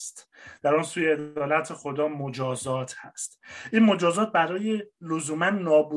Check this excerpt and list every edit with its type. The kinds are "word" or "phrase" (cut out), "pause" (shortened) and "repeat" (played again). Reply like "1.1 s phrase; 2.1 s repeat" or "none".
none